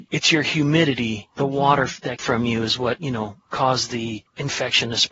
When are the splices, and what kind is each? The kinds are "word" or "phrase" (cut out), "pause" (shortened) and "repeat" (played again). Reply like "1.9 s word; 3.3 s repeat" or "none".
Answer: 2.2 s word